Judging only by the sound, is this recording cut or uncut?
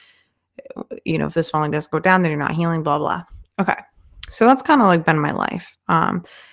uncut